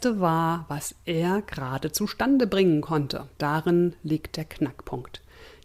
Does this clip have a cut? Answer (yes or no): yes